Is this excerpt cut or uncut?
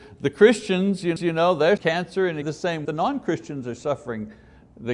cut